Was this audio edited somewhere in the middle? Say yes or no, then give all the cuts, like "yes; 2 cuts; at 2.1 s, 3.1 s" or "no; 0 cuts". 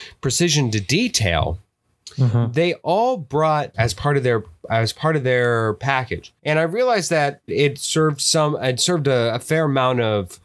yes; 3 cuts; at 3.7 s, 6.4 s, 7.5 s